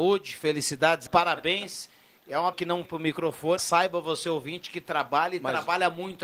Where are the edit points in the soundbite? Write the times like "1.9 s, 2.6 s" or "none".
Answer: 1.1 s, 2.5 s, 2.8 s, 3.6 s

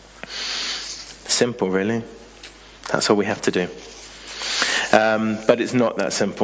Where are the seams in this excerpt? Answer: none

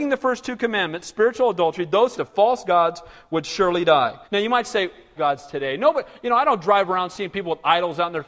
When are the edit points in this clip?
2.1 s, 4.2 s, 5.2 s

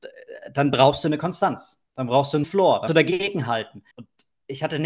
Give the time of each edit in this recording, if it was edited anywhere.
2.4 s, 2.9 s, 3.9 s

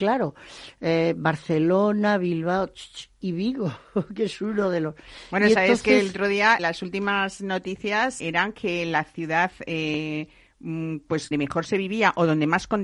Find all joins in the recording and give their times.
6.6 s, 8.2 s, 11.3 s

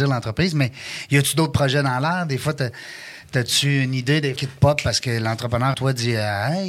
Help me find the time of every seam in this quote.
4.4 s, 5.7 s

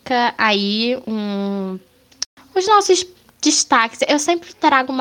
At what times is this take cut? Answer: 1.0 s

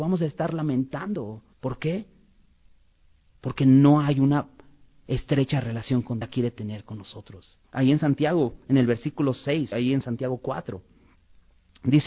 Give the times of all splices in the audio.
1.5 s, 6.2 s, 7.6 s, 9.7 s

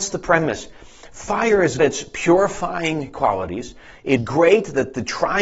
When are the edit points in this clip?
1.8 s, 4.2 s

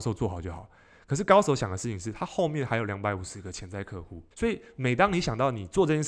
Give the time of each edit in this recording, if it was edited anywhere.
4.3 s

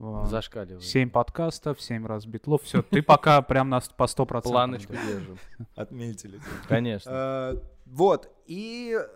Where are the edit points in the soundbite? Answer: 5.7 s

